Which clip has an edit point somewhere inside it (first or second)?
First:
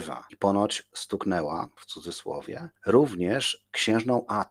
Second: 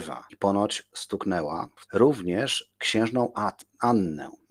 second